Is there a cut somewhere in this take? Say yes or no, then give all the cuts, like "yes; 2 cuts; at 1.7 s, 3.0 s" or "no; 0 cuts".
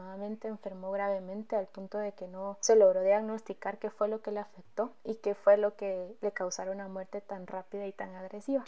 no; 0 cuts